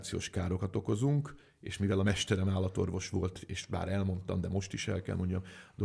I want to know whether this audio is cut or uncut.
uncut